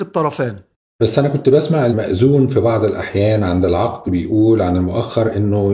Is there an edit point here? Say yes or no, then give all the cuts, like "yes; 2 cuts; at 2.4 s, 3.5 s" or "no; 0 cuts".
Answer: no; 0 cuts